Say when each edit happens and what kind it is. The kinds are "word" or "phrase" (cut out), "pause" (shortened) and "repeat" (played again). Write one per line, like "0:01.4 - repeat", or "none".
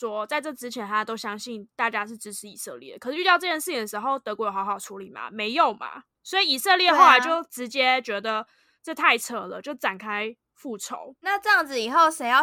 none